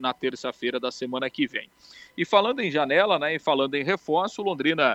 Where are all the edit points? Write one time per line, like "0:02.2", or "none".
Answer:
none